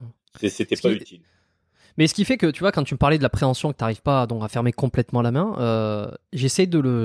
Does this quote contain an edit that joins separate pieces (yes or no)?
no